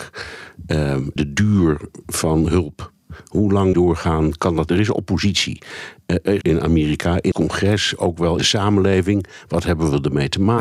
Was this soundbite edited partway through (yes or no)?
yes